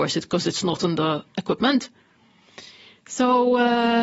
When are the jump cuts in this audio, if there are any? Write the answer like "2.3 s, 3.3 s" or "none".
none